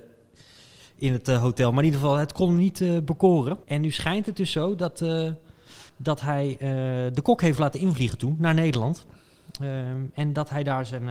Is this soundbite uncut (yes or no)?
no